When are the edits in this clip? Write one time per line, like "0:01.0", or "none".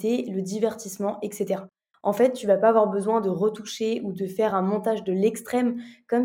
none